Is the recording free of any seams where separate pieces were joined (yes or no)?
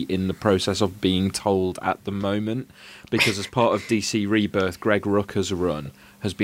yes